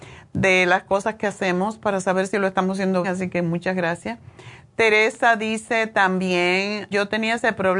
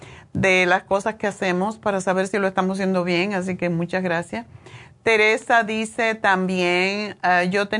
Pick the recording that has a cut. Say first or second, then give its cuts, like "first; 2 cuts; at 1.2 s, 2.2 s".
first; 2 cuts; at 3.0 s, 6.9 s